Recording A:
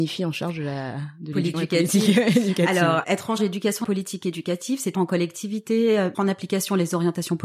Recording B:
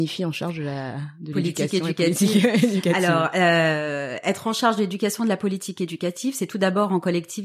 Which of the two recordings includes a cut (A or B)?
A